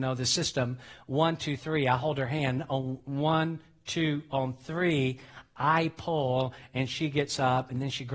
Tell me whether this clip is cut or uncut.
uncut